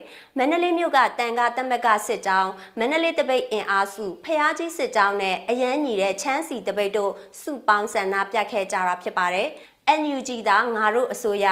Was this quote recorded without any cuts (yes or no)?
no